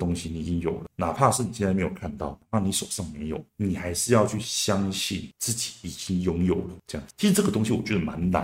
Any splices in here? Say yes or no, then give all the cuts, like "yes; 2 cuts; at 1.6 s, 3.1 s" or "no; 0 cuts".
no; 0 cuts